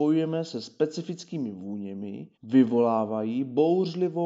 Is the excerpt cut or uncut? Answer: cut